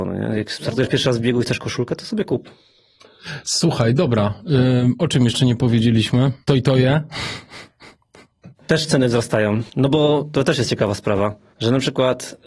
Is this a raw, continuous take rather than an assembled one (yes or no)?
no